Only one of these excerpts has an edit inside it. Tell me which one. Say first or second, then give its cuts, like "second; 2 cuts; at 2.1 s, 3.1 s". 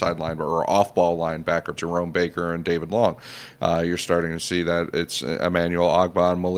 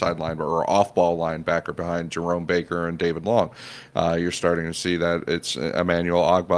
first; 1 cut; at 1.8 s